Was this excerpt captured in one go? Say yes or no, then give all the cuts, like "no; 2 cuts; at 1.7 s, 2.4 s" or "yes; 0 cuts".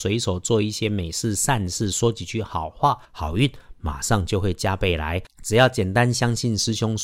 no; 1 cut; at 3.0 s